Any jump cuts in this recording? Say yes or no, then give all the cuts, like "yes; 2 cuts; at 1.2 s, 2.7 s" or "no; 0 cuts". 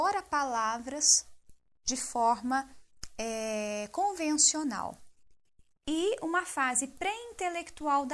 no; 0 cuts